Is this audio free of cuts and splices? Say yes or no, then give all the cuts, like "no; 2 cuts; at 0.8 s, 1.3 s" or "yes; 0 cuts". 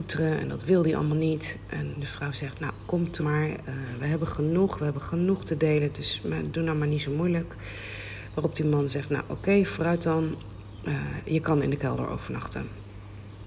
no; 2 cuts; at 1.9 s, 3.2 s